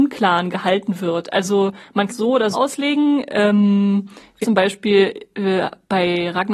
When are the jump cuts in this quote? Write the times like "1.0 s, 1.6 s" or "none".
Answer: 2.1 s, 2.5 s, 4.4 s